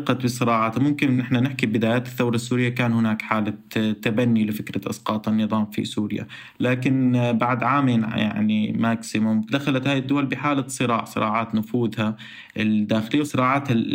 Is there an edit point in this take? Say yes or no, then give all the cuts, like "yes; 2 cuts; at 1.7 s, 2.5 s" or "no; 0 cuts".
no; 0 cuts